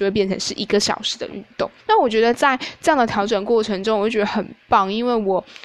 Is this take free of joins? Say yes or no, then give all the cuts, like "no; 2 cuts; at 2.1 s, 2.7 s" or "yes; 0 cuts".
no; 1 cut; at 1.8 s